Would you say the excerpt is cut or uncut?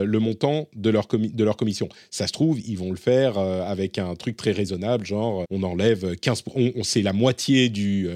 cut